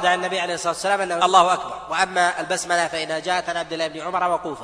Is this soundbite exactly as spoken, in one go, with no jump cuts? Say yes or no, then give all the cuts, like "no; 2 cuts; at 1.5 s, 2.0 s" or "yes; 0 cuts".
no; 1 cut; at 1.2 s